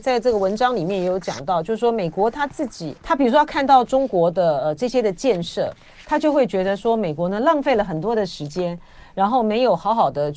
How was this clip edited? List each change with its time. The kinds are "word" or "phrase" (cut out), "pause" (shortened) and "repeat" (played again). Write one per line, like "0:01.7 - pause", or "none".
0:03.0 - pause